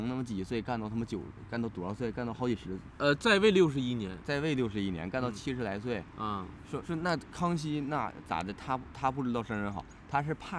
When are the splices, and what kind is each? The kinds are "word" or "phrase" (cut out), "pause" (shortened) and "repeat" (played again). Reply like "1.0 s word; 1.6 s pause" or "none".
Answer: 6.8 s word